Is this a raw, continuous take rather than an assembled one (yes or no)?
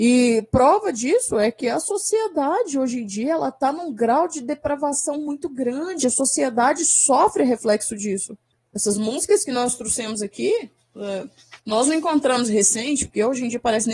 no